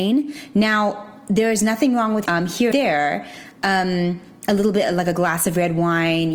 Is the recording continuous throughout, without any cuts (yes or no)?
no